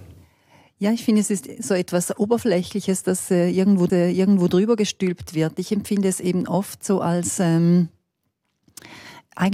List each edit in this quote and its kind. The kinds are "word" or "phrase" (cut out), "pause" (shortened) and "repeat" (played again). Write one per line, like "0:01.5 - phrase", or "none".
0:03.9 - repeat